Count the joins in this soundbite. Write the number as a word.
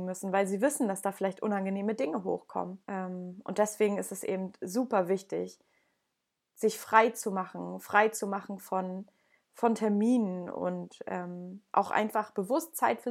one